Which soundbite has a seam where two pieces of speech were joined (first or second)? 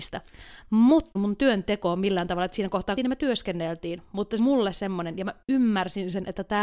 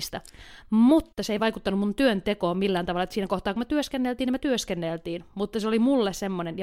first